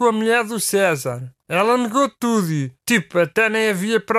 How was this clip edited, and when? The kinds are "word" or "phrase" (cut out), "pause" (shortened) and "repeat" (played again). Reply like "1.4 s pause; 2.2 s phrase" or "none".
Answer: 1.4 s pause; 2.8 s pause